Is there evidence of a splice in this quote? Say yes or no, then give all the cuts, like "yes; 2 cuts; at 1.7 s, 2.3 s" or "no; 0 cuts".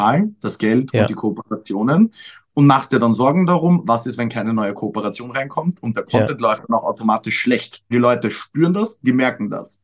yes; 1 cut; at 7.9 s